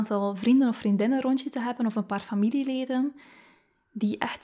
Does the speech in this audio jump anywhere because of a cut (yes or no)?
no